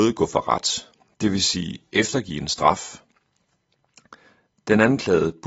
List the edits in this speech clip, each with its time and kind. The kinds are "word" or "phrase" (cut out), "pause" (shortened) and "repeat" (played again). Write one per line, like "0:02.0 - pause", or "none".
none